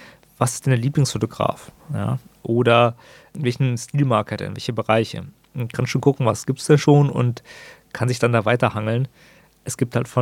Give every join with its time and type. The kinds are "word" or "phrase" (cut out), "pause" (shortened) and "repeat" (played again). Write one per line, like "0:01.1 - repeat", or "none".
none